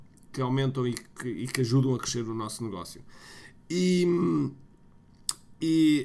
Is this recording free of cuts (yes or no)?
yes